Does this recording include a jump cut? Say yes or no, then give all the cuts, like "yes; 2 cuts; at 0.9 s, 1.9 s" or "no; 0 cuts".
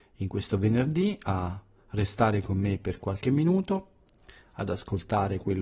no; 0 cuts